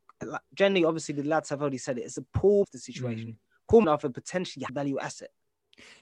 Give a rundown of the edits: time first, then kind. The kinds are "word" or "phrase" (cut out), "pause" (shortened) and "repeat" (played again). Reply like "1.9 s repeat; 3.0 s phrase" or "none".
2.6 s word; 3.8 s word; 4.7 s word